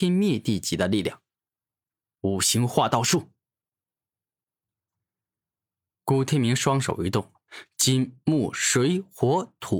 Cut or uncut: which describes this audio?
cut